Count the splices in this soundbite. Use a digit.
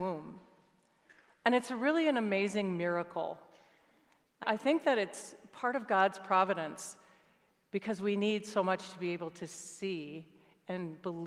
1